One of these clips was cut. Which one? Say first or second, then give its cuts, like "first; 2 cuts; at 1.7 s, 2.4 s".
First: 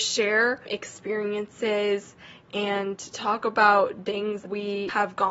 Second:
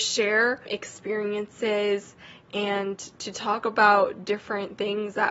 first; 3 cuts; at 3.1 s, 4.0 s, 4.4 s